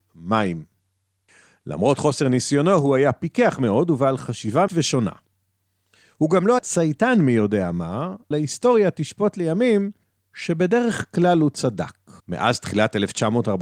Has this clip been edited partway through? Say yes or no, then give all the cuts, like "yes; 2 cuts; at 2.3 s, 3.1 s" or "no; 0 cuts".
yes; 5 cuts; at 4.7 s, 6.6 s, 8.3 s, 10.0 s, 12.2 s